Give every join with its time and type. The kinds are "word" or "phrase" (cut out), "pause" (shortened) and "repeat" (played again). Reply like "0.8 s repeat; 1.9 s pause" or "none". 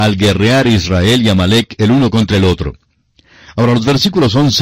none